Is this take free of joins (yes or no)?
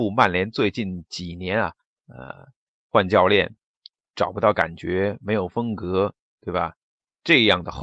yes